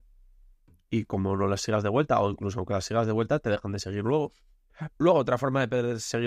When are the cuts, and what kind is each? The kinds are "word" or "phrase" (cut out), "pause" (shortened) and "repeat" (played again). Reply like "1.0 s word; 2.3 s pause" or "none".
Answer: 4.9 s pause